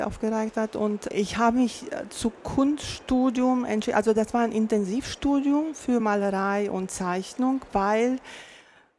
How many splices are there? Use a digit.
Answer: 0